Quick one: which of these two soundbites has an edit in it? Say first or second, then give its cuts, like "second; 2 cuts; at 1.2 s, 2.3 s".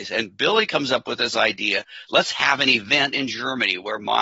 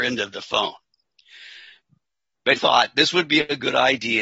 second; 1 cut; at 2.5 s